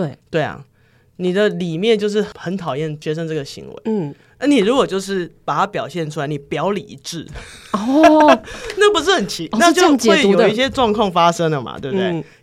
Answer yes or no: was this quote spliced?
no